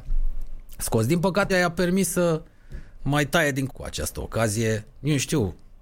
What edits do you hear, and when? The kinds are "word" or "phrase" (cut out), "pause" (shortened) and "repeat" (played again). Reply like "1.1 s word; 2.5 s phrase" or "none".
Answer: 1.5 s word; 3.0 s word; 3.7 s word

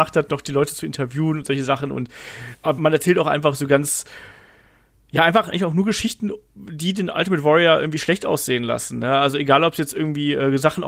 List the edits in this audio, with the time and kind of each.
2.8 s word; 5.5 s word

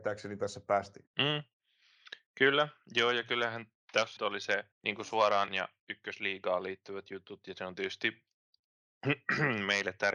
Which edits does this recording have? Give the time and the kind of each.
1.1 s pause; 4.2 s word; 4.7 s pause; 5.5 s word

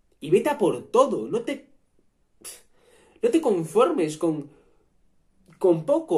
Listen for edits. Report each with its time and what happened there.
none

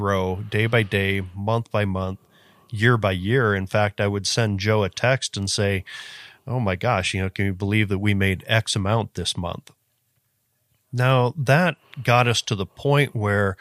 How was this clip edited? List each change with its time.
none

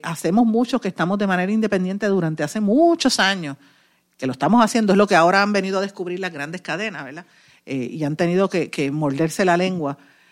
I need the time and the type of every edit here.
none

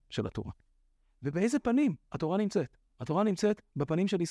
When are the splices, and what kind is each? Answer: 2.9 s pause

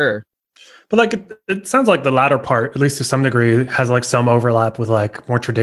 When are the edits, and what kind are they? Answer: none

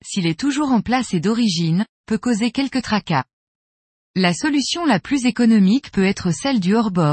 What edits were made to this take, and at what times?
none

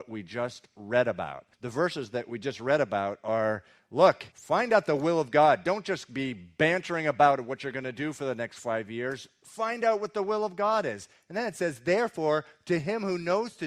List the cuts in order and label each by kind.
1.5 s pause; 4.3 s pause

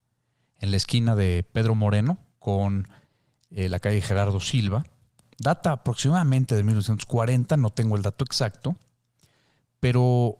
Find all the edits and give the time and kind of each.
none

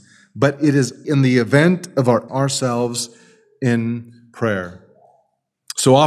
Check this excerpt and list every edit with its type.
1.0 s word; 2.3 s word

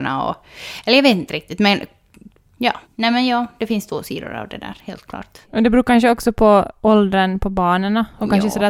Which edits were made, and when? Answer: 2.8 s pause; 5.4 s pause

